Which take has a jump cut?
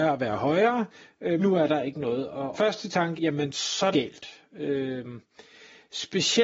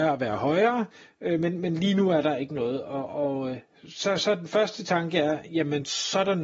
first; 4 cuts; at 1.4 s, 2.5 s, 3.2 s, 3.9 s

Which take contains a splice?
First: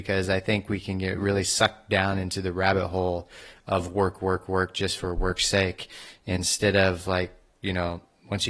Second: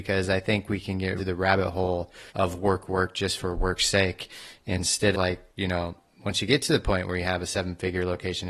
second; 5 cuts; at 1.2 s, 2.3 s, 2.9 s, 5.1 s, 5.5 s

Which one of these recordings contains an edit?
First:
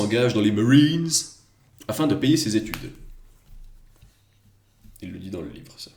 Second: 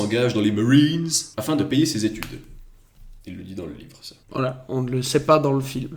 second; 3 cuts; at 1.3 s, 3.2 s, 4.2 s

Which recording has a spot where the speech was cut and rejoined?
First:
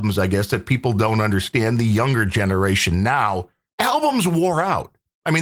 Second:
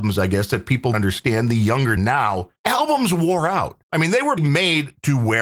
second; 5 cuts; at 0.9 s, 2.0 s, 2.6 s, 3.8 s, 4.4 s

